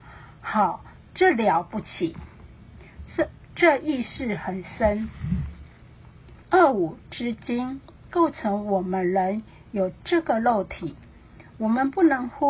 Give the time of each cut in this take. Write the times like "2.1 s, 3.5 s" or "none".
6.4 s